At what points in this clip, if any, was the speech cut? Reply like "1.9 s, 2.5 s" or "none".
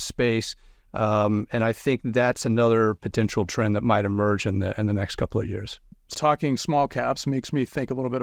6.1 s